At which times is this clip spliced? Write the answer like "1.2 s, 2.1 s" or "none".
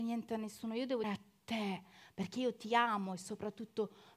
1.0 s